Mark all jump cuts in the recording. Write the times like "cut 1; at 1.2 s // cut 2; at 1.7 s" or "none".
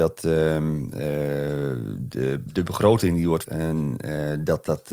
cut 1; at 3.4 s